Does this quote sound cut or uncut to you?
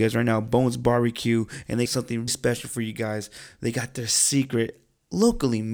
cut